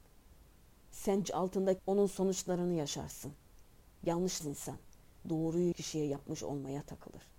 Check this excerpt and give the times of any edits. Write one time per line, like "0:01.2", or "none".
0:01.2
0:01.8
0:04.4
0:05.7

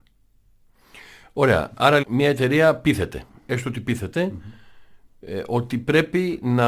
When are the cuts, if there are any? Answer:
0:02.0

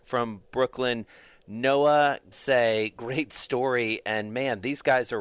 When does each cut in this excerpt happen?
0:02.3
0:02.9

